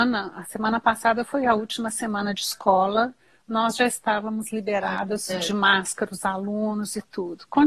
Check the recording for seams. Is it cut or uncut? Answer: uncut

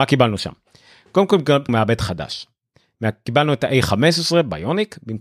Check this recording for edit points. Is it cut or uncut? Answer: cut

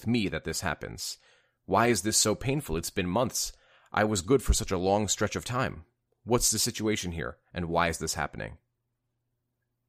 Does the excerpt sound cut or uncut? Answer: uncut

